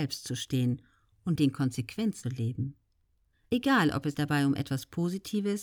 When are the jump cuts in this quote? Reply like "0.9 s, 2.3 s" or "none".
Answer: 1.4 s, 2.2 s, 4.1 s